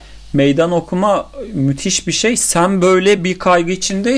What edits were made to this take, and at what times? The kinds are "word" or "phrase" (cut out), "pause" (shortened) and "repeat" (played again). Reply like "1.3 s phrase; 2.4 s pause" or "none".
none